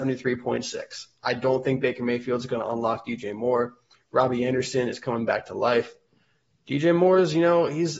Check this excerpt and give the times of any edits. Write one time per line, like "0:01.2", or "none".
none